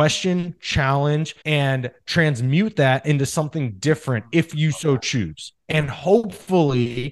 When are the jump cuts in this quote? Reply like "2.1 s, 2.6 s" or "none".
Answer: 1.4 s, 5.6 s